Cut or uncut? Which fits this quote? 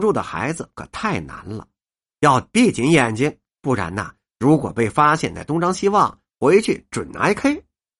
uncut